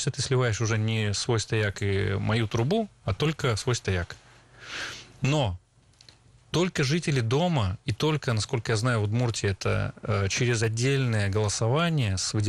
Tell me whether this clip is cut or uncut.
uncut